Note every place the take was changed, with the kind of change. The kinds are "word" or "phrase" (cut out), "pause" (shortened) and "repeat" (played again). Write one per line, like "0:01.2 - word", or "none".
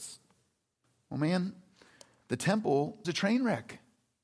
0:03.0 - word